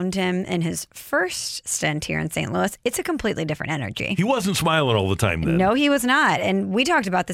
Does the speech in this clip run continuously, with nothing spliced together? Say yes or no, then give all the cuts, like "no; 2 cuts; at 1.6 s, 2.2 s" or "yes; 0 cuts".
yes; 0 cuts